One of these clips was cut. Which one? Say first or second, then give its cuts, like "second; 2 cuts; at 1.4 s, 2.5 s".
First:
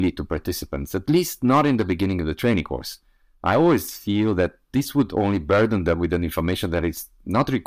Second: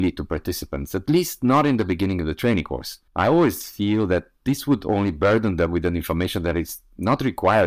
second; 1 cut; at 3.1 s